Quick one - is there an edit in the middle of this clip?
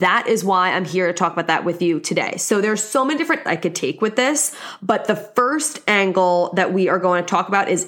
yes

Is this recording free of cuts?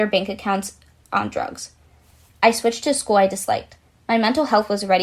yes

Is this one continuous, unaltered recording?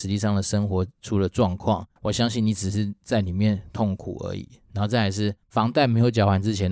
no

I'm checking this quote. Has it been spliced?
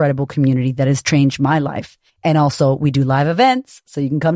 yes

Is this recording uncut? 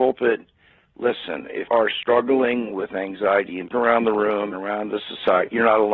no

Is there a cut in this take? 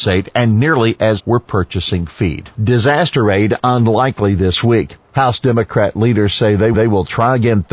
yes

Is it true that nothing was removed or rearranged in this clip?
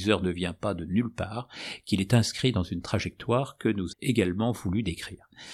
no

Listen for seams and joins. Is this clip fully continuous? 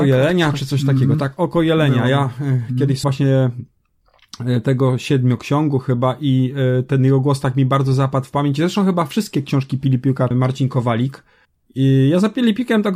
no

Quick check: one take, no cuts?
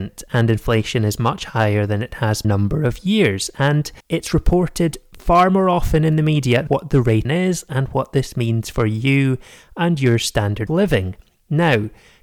no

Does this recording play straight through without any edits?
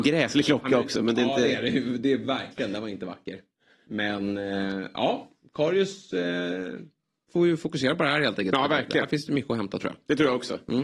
yes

